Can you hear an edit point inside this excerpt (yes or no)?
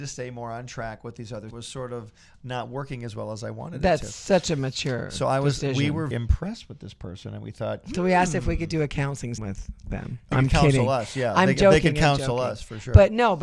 yes